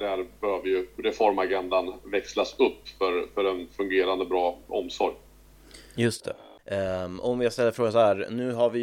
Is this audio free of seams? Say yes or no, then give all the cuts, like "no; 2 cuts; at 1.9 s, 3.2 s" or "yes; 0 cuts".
no; 1 cut; at 6.2 s